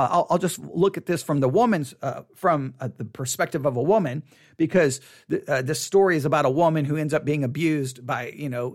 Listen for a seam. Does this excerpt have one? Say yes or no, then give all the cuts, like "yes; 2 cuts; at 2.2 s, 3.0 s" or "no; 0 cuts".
no; 0 cuts